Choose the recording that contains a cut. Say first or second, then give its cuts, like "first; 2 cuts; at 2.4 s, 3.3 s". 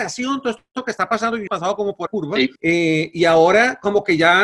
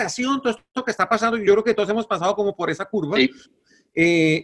first; 3 cuts; at 1.5 s, 2.1 s, 2.6 s